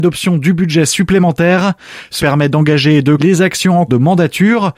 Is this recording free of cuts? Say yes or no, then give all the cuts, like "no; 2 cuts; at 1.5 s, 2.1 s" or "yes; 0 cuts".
no; 3 cuts; at 2.2 s, 3.2 s, 3.9 s